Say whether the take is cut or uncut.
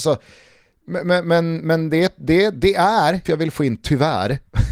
cut